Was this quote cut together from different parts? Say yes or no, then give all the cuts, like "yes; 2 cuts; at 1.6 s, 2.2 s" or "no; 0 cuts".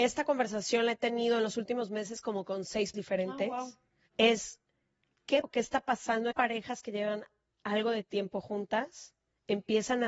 yes; 3 cuts; at 2.9 s, 5.4 s, 6.3 s